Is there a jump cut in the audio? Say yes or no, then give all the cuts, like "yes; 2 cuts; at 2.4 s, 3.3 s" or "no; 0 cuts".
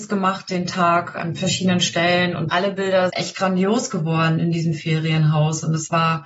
yes; 3 cuts; at 2.5 s, 3.1 s, 4.4 s